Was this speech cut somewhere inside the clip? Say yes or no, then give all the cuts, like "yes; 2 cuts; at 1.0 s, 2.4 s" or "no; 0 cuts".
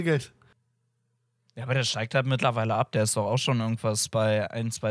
no; 0 cuts